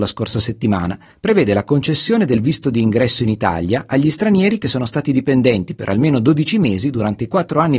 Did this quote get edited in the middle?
no; 0 cuts

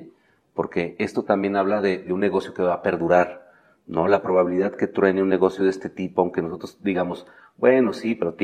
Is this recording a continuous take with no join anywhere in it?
yes; 0 cuts

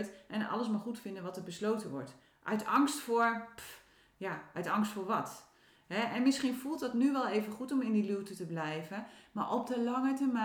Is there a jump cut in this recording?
no; 0 cuts

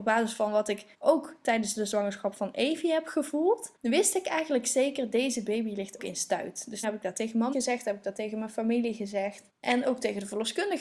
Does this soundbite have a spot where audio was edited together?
yes; 6 cuts; at 0.9 s, 3.8 s, 6.0 s, 6.8 s, 7.5 s, 9.5 s

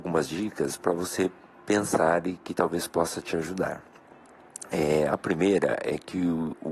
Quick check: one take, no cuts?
yes; 0 cuts

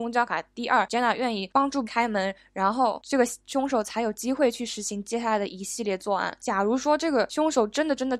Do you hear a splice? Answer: yes; 1 cut; at 1.8 s

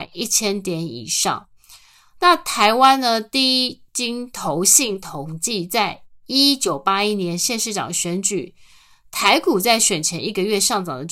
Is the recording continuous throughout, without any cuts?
yes; 0 cuts

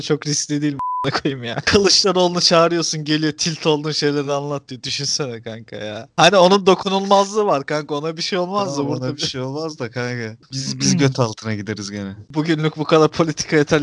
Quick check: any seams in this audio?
no; 0 cuts

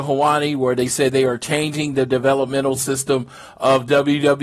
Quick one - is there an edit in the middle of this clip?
no; 0 cuts

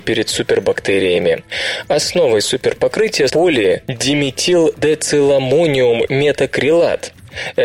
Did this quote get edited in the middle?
yes; 2 cuts; at 3.3 s, 6.1 s

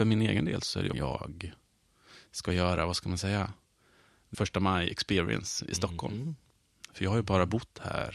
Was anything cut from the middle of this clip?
yes; 2 cuts; at 0.9 s, 4.3 s

